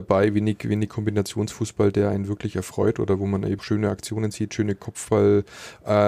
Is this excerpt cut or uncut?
cut